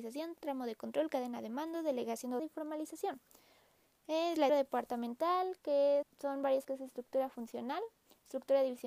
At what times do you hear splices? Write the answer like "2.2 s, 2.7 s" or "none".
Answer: 2.4 s, 4.5 s, 6.0 s, 6.6 s